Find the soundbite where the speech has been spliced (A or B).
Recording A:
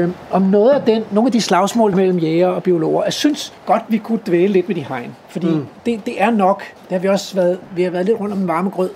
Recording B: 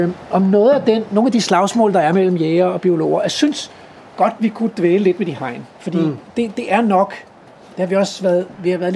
A